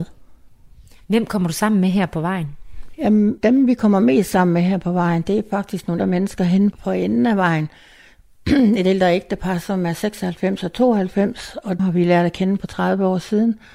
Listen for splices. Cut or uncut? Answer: cut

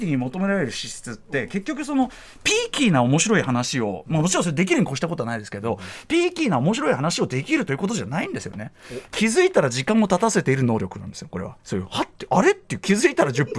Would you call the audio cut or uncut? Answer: cut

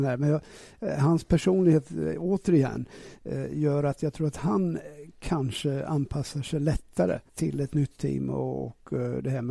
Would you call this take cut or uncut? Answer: cut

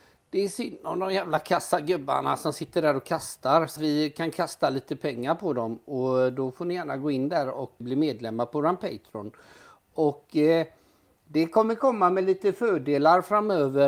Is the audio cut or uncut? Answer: cut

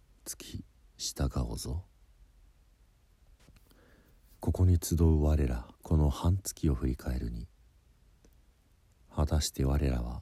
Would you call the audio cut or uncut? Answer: cut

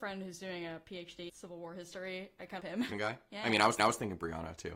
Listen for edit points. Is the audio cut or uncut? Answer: cut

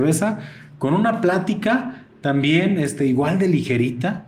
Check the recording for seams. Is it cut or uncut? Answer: uncut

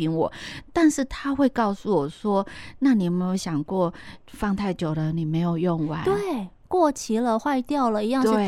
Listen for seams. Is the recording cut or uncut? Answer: uncut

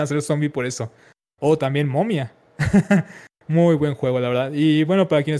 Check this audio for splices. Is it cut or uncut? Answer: uncut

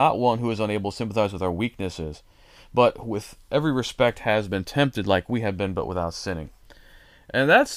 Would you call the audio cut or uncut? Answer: uncut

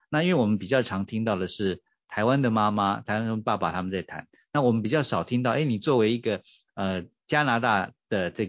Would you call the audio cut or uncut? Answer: uncut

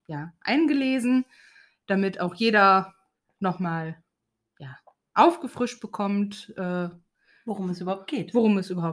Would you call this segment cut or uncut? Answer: uncut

